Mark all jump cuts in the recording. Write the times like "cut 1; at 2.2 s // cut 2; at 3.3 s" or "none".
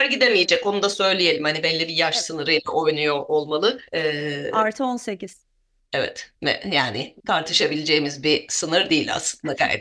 cut 1; at 3.9 s // cut 2; at 6.4 s // cut 3; at 7.2 s